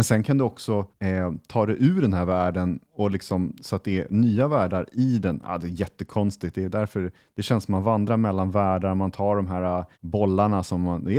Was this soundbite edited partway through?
yes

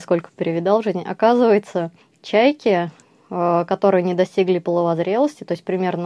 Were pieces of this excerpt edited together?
yes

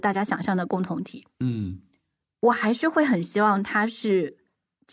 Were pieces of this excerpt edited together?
no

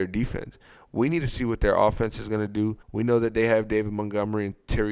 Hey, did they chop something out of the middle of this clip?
yes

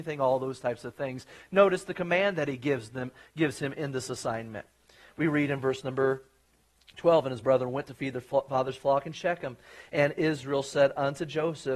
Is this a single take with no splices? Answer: yes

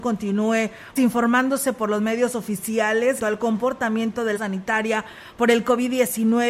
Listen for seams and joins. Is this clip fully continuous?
no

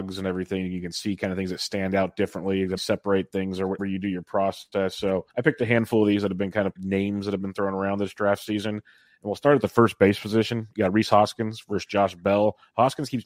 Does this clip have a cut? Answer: yes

